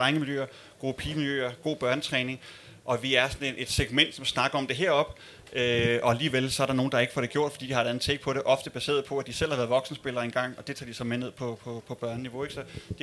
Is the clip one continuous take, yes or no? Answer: yes